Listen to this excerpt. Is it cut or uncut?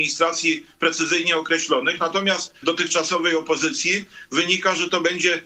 cut